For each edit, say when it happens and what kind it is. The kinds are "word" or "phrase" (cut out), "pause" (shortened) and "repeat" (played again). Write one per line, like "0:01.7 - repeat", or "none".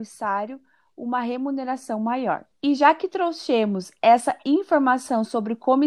0:02.5 - pause